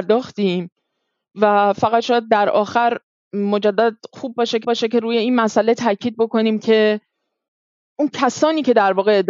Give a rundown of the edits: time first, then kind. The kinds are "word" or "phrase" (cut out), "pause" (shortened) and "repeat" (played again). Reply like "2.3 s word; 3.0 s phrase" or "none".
4.6 s repeat

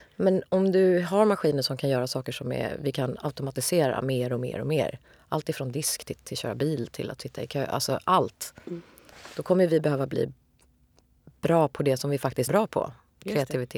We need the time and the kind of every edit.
6.2 s word; 12.5 s word

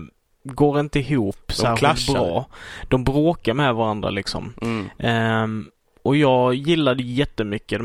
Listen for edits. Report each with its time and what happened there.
none

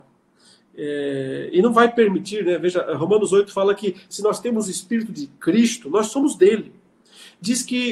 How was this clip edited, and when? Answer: none

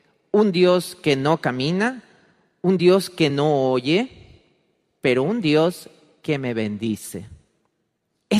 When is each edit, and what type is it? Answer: none

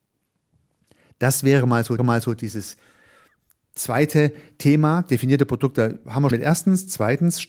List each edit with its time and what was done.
2.0 s repeat; 6.3 s word

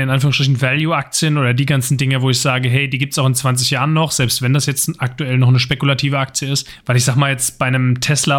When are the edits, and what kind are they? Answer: none

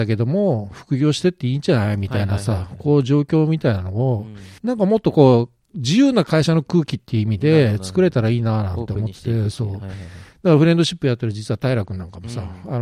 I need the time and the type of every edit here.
4.6 s pause

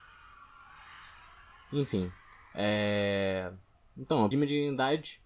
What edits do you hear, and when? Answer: 4.3 s word

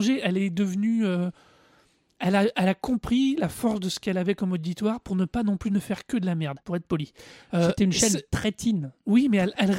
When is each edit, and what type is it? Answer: 6.6 s pause

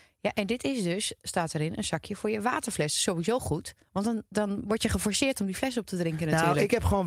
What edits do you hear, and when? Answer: 3.8 s pause

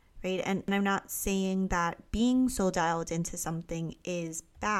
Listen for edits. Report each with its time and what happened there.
none

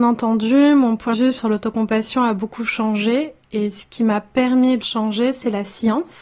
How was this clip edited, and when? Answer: 1.1 s word; 4.8 s phrase

